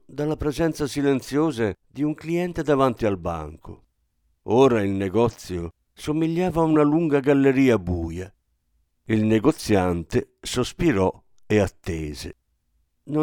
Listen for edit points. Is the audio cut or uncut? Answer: uncut